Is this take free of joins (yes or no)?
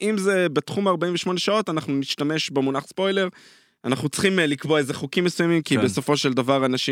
yes